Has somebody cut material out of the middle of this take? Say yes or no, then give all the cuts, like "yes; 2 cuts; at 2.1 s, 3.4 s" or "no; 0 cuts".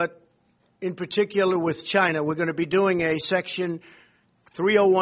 no; 0 cuts